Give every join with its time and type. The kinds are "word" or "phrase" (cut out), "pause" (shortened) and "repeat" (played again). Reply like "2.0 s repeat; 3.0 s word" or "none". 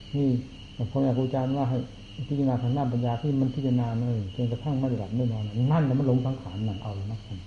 none